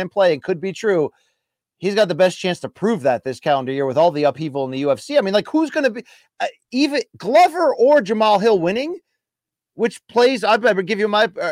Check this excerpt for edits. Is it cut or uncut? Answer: uncut